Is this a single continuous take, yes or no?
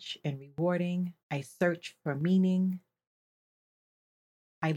no